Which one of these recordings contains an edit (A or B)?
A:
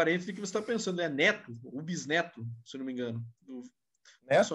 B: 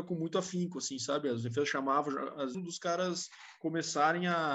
B